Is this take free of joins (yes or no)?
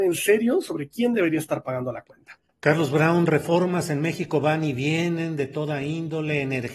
no